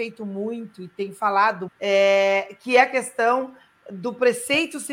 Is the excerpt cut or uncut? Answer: cut